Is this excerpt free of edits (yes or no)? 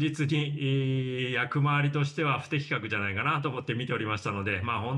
yes